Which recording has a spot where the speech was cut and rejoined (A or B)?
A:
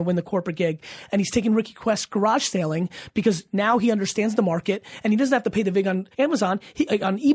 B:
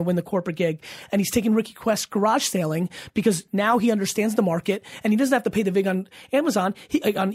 A